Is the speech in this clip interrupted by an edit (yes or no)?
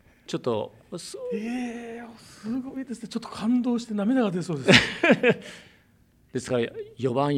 no